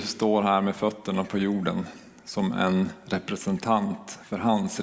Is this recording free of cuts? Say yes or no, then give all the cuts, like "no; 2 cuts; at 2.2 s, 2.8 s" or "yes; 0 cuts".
yes; 0 cuts